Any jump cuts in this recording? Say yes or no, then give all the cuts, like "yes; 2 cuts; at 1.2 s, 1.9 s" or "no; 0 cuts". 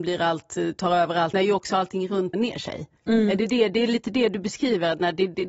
yes; 3 cuts; at 1.3 s, 2.3 s, 3.0 s